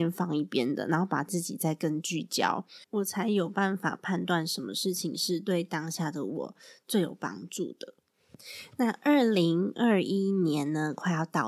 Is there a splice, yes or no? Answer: yes